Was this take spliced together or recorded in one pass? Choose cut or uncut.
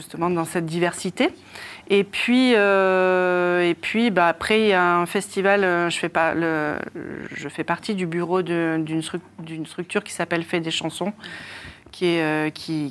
uncut